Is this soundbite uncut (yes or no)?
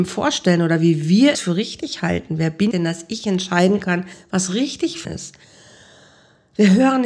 no